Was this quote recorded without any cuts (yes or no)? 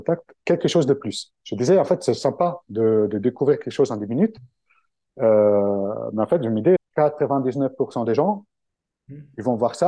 no